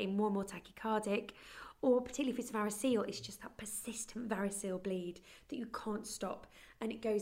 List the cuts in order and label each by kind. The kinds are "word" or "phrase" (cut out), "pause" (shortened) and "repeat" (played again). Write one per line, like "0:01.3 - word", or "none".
none